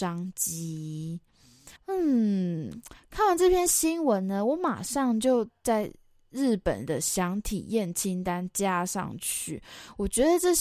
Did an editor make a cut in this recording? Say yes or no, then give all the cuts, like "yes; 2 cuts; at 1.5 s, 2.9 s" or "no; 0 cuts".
yes; 1 cut; at 1.8 s